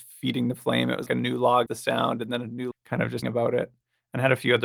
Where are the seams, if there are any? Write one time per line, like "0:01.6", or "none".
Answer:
0:01.1
0:01.7
0:02.7
0:03.2